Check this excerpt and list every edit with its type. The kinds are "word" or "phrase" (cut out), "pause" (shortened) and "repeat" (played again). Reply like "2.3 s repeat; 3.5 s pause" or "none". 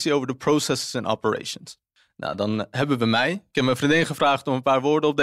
none